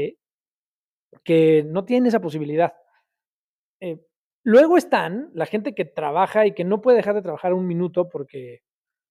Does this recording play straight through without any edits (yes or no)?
yes